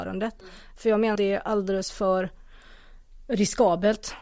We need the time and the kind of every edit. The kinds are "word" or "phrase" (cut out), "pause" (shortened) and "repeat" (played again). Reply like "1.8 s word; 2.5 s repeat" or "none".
1.2 s word